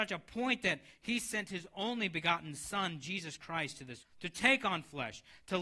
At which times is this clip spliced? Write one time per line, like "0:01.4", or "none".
0:04.0

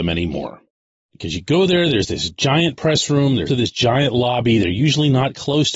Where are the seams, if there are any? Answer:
0:03.5

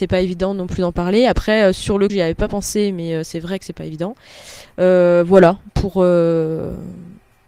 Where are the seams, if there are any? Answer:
0:02.1

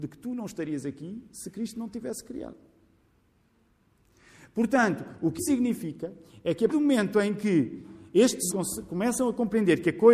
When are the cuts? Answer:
0:05.4
0:06.7
0:08.5

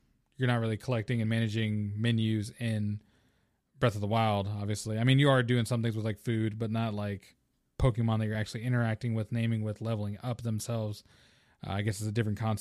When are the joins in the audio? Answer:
none

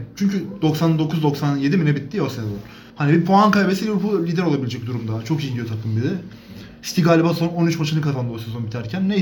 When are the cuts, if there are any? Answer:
0:02.9

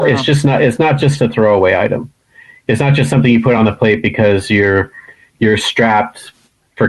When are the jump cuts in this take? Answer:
none

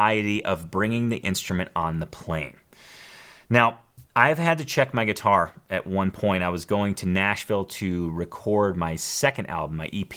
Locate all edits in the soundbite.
0:04.1

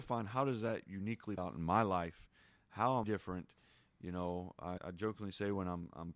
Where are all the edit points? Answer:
0:01.4
0:03.0
0:04.8

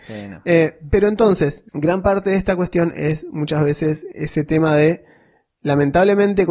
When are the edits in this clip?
0:01.7
0:04.1

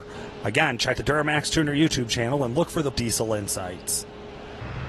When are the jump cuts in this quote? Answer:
0:01.0
0:02.9

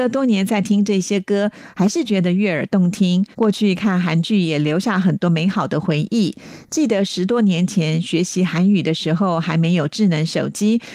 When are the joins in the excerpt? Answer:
0:03.3

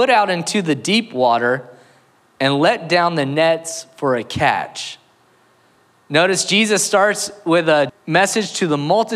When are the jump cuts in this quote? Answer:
0:07.9

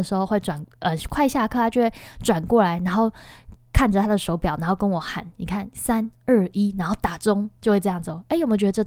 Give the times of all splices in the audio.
0:05.3

